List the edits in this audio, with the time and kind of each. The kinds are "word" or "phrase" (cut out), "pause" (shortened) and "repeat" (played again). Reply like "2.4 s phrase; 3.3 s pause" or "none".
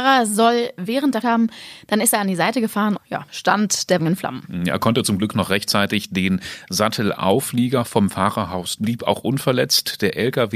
1.2 s phrase; 3.0 s word; 3.3 s word; 4.0 s word; 8.8 s phrase